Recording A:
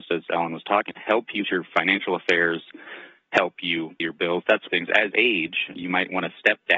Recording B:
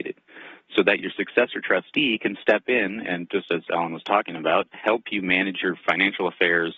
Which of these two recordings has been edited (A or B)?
A